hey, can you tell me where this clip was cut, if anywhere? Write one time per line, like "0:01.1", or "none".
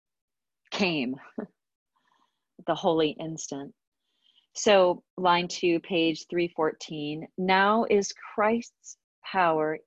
0:05.1